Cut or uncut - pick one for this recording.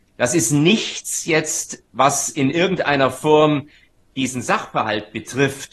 uncut